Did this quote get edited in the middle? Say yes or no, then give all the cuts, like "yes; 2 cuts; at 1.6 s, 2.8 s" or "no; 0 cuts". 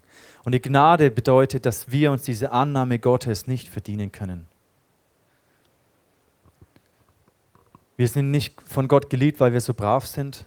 no; 0 cuts